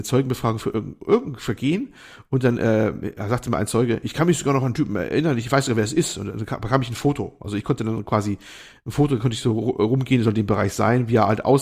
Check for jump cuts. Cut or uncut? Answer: uncut